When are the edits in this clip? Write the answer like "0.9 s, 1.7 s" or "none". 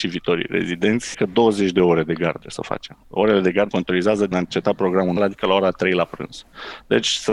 1.1 s, 2.4 s, 3.0 s, 3.7 s, 4.3 s, 5.2 s